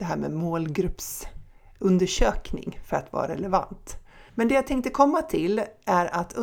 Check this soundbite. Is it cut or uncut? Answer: cut